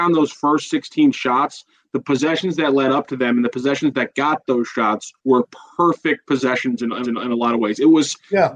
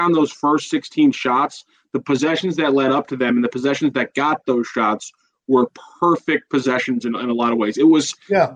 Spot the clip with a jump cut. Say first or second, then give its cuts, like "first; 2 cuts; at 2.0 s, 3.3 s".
first; 2 cuts; at 5.2 s, 7.0 s